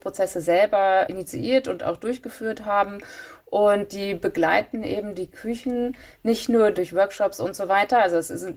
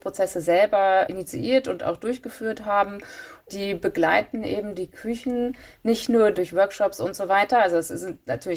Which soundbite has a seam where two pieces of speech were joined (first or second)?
second